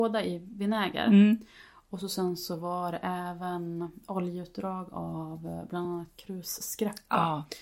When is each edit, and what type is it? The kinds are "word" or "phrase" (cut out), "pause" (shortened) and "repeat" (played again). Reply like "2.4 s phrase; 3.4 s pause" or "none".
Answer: none